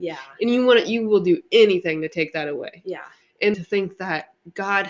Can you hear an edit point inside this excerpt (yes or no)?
yes